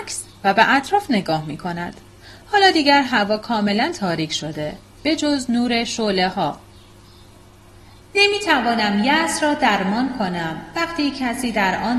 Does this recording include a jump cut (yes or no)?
no